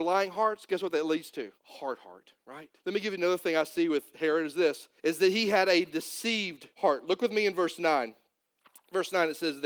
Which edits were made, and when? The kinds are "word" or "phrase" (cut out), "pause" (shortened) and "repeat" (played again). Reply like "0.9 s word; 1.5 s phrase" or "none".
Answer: 1.6 s pause; 2.8 s pause; 5.0 s pause; 6.7 s pause